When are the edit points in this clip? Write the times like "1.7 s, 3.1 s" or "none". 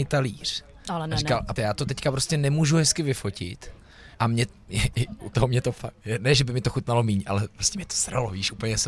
1.6 s, 4.1 s, 5.3 s